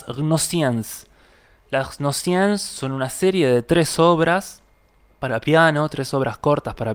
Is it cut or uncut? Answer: uncut